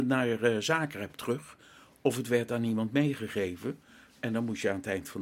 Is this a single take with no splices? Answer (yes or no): yes